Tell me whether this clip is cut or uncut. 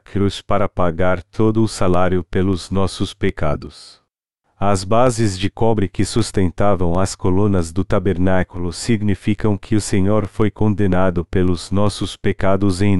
uncut